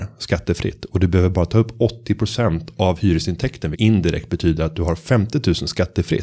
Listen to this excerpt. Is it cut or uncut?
cut